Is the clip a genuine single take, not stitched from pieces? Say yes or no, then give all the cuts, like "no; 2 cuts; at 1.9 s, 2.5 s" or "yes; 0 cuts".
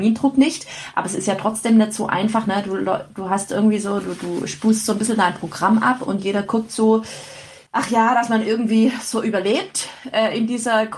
no; 1 cut; at 7.7 s